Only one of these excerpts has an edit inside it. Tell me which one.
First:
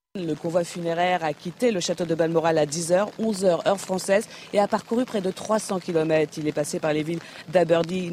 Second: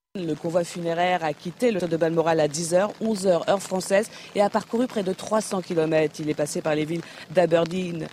second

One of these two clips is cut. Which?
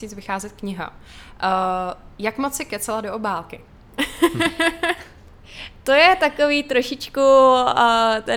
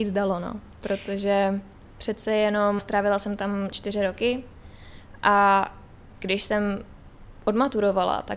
second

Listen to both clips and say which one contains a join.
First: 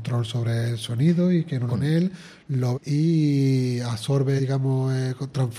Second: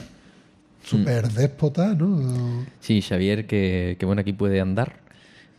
first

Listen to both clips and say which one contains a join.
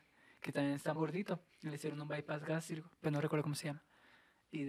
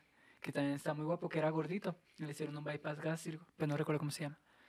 first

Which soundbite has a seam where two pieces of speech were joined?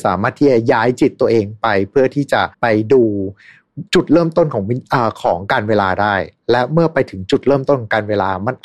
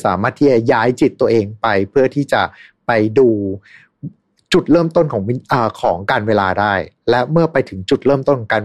first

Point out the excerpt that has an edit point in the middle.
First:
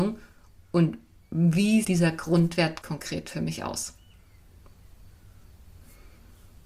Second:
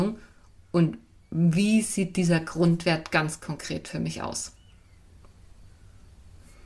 first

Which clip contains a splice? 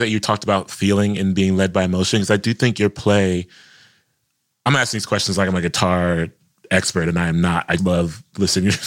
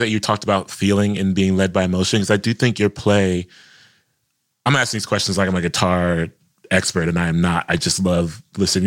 first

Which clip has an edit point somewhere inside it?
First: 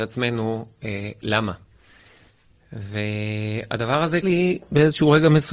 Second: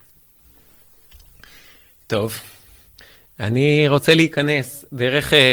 first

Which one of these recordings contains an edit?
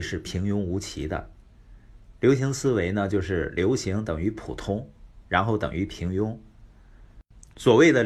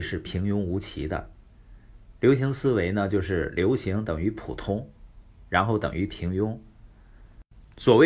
first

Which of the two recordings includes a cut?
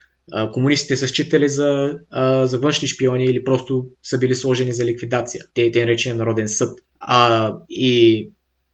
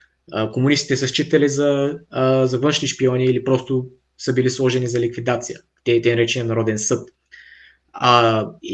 first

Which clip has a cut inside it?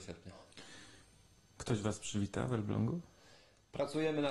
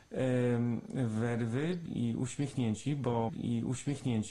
second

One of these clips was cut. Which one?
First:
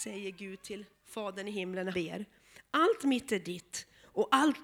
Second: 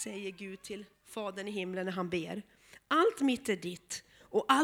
first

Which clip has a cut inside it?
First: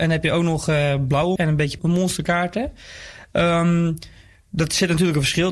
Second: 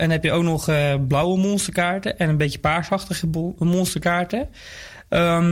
first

